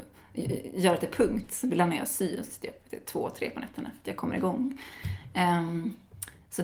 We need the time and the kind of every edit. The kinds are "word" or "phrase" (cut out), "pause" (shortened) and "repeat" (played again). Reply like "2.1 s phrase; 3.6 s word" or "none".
none